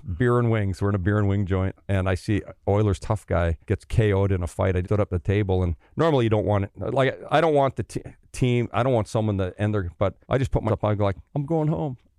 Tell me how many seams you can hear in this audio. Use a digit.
6